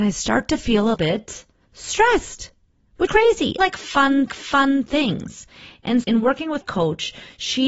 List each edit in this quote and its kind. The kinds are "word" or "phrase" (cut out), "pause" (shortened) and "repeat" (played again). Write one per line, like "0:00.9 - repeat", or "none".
0:00.9 - word
0:01.6 - pause
0:03.1 - word
0:03.6 - phrase
0:04.3 - repeat
0:06.0 - word
0:06.6 - word